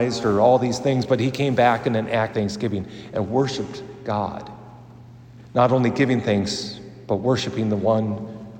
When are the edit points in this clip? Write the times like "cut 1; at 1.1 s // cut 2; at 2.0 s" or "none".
cut 1; at 2.3 s